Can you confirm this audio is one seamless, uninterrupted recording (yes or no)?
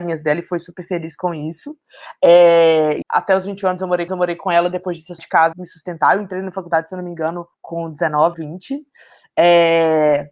no